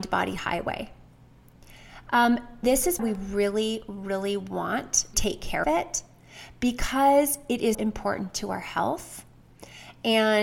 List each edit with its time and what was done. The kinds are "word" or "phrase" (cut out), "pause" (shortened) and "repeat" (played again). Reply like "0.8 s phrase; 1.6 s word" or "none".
2.6 s word; 3.0 s word; 5.1 s word; 5.6 s word; 7.7 s word